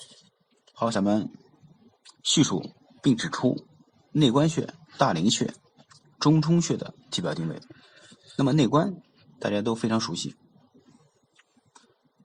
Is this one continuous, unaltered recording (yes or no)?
no